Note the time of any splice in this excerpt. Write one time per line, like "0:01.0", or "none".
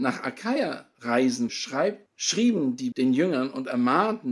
0:01.5
0:02.1
0:02.9

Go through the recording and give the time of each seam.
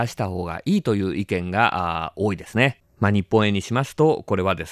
0:02.9

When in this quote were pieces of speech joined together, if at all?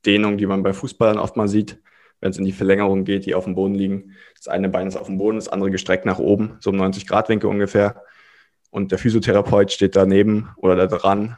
none

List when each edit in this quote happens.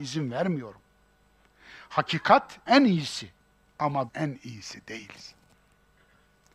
0:02.7
0:04.1

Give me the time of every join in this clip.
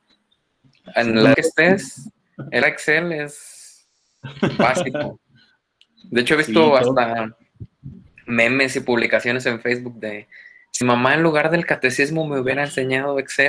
0:01.3
0:02.6
0:10.8

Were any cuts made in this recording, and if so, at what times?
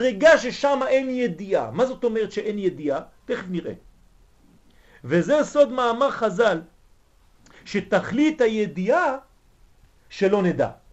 none

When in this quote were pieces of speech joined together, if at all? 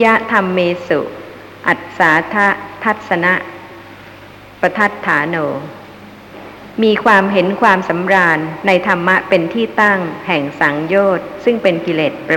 none

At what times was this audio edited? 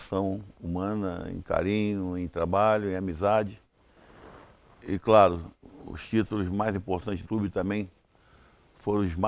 0:07.2

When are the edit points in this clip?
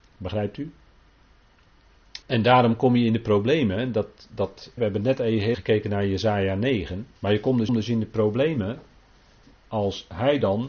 0:02.2
0:04.8
0:05.5
0:07.2
0:07.7

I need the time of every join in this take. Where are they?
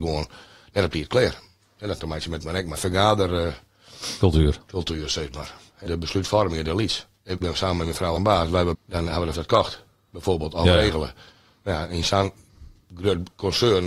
0:02.0
0:02.4
0:02.7
0:05.9
0:07.4
0:08.2
0:08.7
0:09.3

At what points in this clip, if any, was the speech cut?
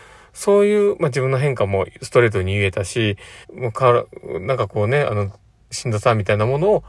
0:03.4

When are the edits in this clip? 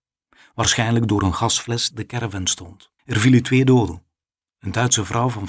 0:01.9
0:03.0

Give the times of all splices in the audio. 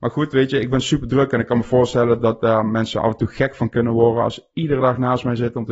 none

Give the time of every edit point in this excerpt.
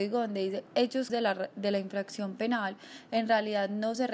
0:01.1

